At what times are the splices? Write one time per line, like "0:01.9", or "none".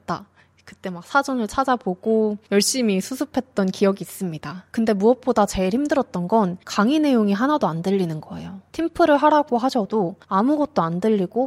0:06.6

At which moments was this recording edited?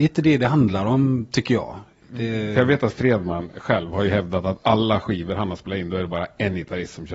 none

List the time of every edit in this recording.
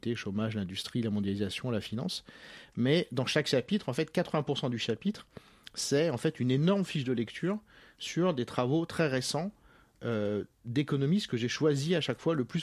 none

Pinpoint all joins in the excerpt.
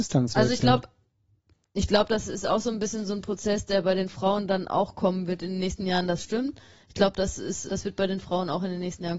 0:07.7

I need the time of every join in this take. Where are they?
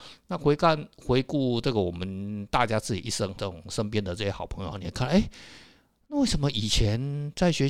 0:03.4
0:04.7

